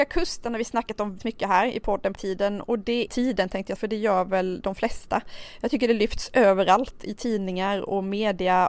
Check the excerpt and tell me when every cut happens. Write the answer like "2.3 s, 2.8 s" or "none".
1.2 s, 2.1 s, 3.1 s, 3.8 s